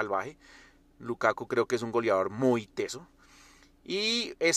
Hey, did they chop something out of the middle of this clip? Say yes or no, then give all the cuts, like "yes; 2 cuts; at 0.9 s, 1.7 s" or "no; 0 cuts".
no; 0 cuts